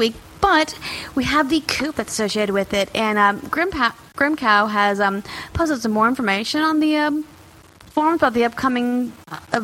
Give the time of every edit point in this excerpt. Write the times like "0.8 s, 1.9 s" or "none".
none